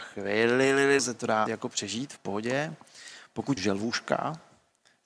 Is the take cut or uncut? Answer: cut